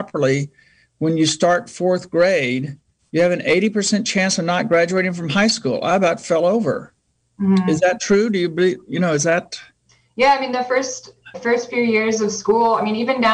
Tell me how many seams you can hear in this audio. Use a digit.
1